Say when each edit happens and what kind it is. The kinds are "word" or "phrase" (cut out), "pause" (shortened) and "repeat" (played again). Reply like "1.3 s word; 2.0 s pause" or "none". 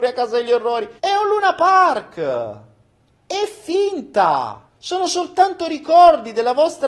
1.0 s pause; 4.7 s pause